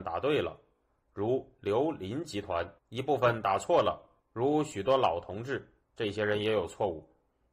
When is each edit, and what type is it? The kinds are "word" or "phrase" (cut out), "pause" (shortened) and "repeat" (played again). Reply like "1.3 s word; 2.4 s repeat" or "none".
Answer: 2.8 s pause; 4.2 s pause; 5.8 s pause